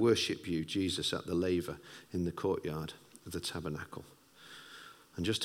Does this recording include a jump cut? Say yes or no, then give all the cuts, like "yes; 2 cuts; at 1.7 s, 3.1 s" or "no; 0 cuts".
no; 0 cuts